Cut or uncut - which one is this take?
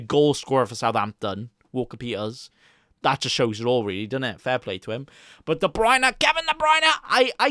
uncut